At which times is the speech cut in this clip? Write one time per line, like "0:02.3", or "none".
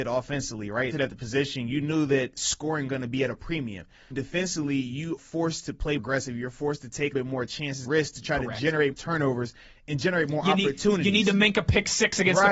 0:00.9
0:02.9
0:04.1
0:05.2
0:06.0
0:07.1
0:07.8
0:08.9